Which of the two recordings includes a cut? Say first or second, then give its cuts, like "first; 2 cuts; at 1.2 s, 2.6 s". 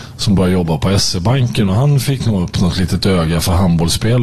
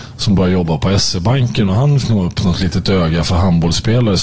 second; 1 cut; at 2.0 s